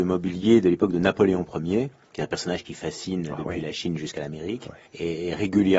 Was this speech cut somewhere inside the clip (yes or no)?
yes